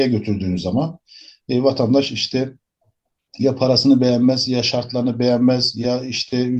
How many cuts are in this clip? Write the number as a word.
zero